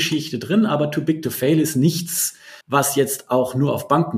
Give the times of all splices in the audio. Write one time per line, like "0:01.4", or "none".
0:02.6